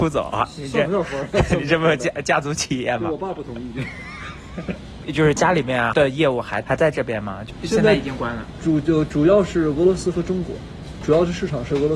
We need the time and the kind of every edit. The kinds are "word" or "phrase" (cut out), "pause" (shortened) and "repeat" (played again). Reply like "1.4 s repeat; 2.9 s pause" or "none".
none